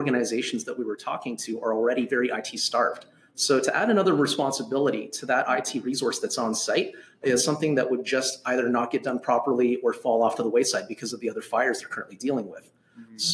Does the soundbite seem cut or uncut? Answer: uncut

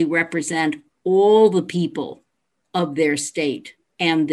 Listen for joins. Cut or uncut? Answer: uncut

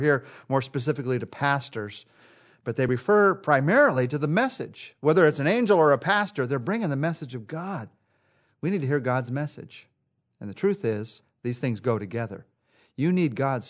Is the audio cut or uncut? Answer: uncut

